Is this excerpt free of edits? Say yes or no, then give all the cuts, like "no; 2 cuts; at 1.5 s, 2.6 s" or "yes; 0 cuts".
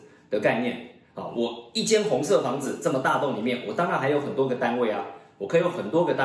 yes; 0 cuts